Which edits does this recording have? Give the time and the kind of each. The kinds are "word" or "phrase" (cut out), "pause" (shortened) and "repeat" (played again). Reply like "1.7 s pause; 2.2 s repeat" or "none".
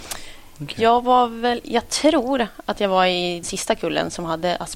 3.4 s word